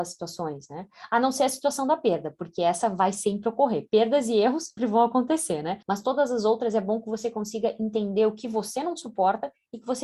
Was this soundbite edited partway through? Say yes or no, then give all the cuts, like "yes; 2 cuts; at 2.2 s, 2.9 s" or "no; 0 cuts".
yes; 2 cuts; at 4.8 s, 5.8 s